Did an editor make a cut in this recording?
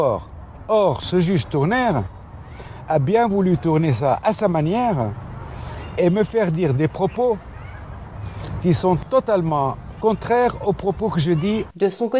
no; 0 cuts

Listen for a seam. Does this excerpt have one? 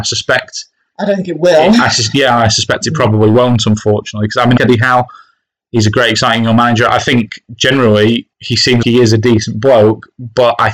yes; 3 cuts; at 4.6 s, 8.3 s, 8.8 s

